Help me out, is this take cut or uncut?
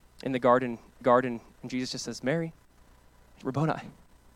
cut